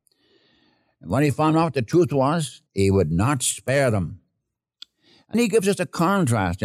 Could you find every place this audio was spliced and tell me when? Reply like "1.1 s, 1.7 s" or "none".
2.7 s, 5.3 s